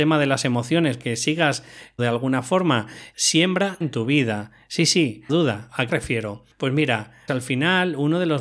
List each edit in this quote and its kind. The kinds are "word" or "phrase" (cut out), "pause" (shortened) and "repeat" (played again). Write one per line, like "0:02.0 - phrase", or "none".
0:01.0 - word
0:02.0 - word
0:03.1 - word
0:03.8 - word
0:05.3 - word
0:05.9 - word
0:07.3 - word